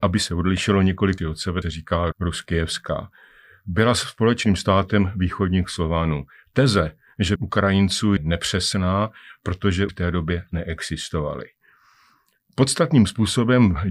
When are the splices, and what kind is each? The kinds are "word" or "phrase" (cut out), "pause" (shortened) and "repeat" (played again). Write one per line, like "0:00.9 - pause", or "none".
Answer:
0:01.2 - word
0:01.6 - phrase
0:02.1 - word
0:07.4 - phrase
0:08.2 - word
0:09.9 - word